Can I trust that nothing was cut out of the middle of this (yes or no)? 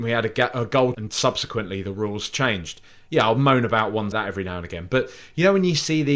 no